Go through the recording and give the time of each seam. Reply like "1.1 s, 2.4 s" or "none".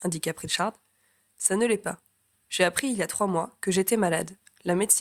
none